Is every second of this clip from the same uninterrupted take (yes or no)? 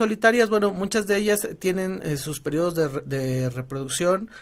yes